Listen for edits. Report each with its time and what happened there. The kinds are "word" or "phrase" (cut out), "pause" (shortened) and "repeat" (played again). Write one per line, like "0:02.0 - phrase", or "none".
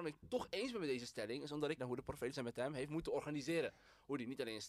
0:01.8 - word
0:02.3 - word